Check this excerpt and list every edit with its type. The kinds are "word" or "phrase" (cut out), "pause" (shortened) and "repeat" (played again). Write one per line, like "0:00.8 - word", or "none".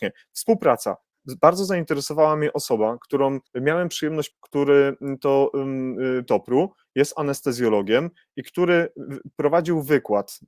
0:03.5 - pause
0:04.3 - phrase
0:06.3 - phrase